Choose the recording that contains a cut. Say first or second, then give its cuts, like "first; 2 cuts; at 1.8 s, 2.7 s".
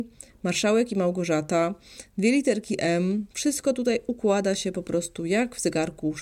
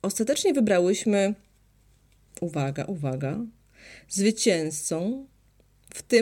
first; 1 cut; at 3.3 s